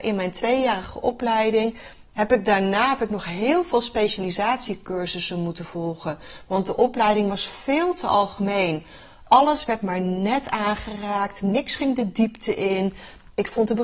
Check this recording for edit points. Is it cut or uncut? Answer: uncut